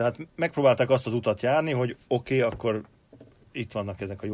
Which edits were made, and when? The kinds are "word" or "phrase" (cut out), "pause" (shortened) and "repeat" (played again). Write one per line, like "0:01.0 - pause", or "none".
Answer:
none